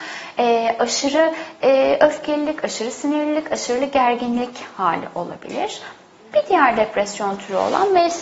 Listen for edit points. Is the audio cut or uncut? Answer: uncut